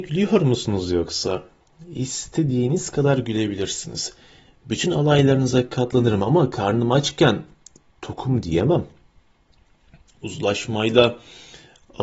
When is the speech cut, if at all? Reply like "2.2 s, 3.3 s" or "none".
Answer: none